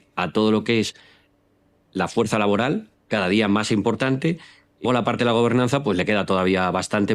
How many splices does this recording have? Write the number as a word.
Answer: one